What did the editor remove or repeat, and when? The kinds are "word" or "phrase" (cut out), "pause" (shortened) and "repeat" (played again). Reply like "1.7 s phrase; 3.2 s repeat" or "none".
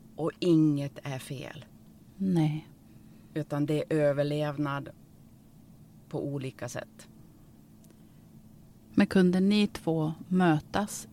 none